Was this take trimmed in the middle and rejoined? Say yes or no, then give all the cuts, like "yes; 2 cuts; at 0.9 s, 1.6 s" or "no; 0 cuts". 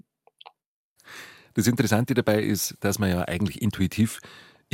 no; 0 cuts